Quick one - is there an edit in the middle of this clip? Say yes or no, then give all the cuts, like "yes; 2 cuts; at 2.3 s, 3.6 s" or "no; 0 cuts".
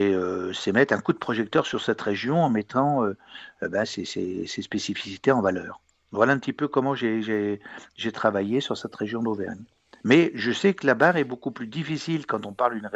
no; 0 cuts